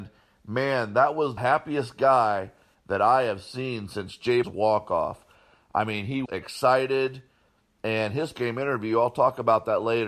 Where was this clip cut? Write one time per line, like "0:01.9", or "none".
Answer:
0:01.4
0:04.4
0:06.3
0:08.3